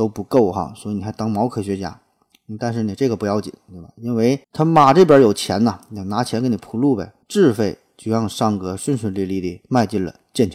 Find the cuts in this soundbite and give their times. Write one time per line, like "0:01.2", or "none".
0:04.4
0:07.2